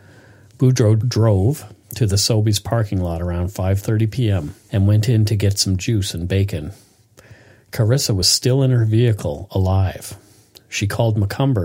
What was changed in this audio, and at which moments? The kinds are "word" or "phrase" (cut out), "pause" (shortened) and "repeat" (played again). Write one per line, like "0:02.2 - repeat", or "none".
none